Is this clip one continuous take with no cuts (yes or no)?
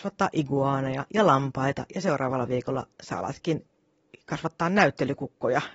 yes